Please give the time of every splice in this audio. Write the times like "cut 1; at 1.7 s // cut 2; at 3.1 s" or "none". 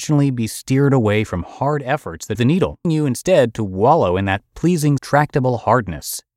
cut 1; at 2.4 s // cut 2; at 2.8 s // cut 3; at 5.0 s